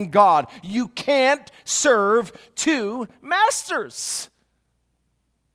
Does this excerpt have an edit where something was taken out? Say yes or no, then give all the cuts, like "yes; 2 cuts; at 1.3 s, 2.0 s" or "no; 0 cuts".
no; 0 cuts